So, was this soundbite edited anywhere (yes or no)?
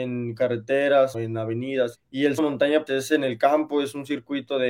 yes